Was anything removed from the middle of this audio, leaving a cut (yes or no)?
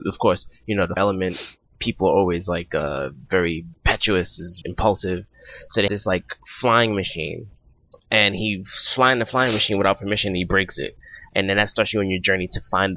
yes